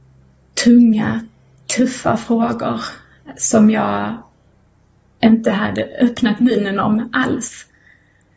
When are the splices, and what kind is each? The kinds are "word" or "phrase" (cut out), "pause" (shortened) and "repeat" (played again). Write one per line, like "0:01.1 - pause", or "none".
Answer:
none